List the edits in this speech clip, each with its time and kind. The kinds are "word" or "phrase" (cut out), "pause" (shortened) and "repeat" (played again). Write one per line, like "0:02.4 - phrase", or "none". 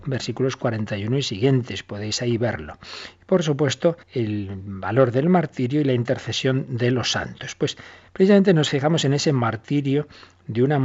0:04.0 - pause